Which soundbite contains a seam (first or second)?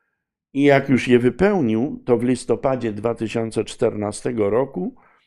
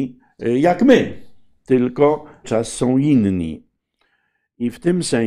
second